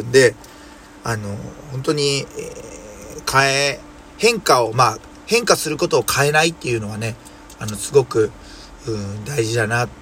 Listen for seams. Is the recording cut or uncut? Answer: uncut